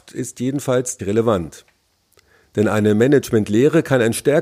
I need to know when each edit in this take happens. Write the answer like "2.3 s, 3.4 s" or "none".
1.0 s